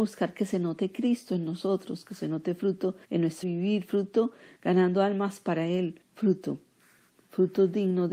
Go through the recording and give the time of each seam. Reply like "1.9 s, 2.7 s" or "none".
3.0 s, 3.4 s, 6.0 s